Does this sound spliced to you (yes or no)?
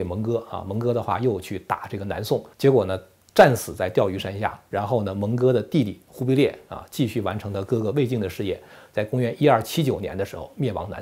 yes